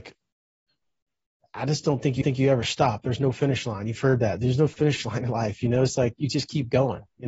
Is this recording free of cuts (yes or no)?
no